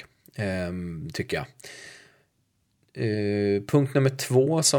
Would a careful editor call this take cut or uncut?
uncut